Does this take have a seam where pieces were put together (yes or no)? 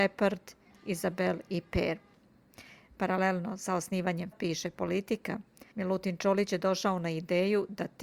yes